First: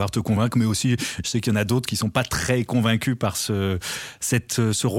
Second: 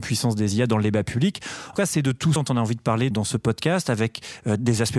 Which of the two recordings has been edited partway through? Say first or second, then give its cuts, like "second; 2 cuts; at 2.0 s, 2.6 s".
second; 3 cuts; at 1.7 s, 2.4 s, 3.1 s